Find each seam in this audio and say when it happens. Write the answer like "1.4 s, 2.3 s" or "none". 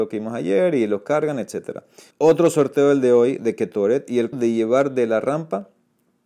1.0 s, 2.1 s, 4.3 s